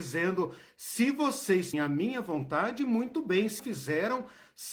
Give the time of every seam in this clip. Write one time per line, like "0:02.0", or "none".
0:01.7
0:03.6